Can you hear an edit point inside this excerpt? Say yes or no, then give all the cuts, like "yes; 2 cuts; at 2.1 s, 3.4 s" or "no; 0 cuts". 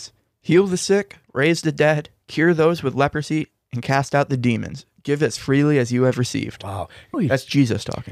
yes; 2 cuts; at 1.2 s, 7.1 s